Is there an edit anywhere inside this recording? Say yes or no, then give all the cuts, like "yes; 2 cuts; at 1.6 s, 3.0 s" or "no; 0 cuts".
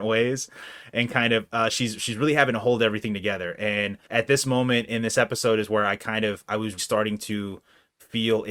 yes; 3 cuts; at 4.0 s, 6.5 s, 6.8 s